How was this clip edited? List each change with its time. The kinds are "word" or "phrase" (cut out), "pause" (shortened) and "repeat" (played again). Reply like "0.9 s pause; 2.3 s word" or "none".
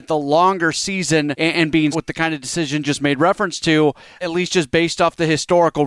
1.3 s word; 1.9 s word; 2.8 s word; 4.2 s word